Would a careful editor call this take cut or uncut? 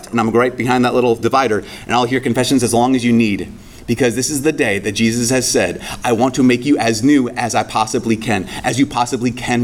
uncut